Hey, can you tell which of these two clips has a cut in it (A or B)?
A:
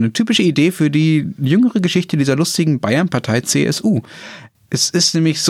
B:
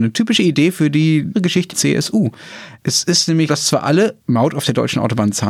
B